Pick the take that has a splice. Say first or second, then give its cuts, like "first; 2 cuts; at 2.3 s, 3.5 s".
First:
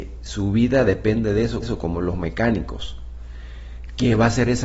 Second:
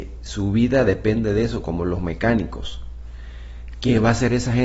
first; 1 cut; at 1.6 s